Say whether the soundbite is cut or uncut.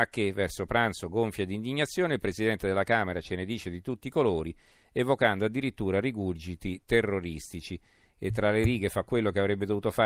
uncut